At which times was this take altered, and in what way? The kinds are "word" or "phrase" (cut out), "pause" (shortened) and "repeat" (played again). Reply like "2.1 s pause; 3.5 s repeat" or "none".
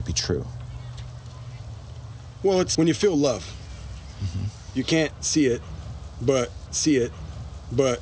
2.7 s word; 6.7 s repeat